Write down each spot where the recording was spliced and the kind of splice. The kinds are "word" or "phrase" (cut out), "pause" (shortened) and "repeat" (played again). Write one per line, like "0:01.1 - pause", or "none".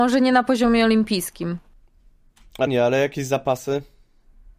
0:02.7 - word